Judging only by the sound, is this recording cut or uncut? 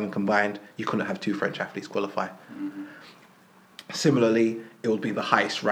uncut